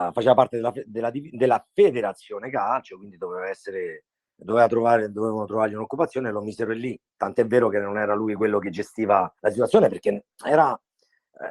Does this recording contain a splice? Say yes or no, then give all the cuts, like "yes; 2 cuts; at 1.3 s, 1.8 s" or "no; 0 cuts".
yes; 2 cuts; at 4.2 s, 9.4 s